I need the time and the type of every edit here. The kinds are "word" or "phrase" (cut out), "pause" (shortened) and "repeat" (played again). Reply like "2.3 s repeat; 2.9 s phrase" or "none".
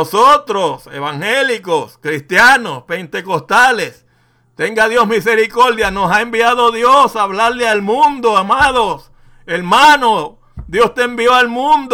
none